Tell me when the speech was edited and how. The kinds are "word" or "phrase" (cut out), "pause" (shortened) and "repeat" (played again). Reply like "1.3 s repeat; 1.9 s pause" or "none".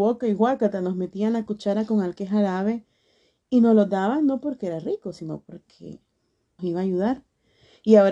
6.6 s word